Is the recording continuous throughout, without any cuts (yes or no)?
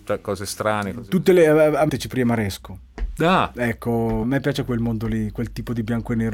no